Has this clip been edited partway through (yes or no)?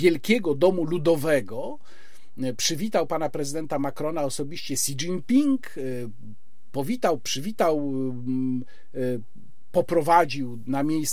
no